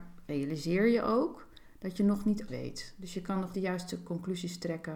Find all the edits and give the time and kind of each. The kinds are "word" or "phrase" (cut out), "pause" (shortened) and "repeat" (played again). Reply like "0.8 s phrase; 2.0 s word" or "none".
2.5 s word; 3.5 s word